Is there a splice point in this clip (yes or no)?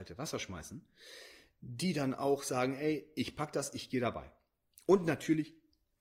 no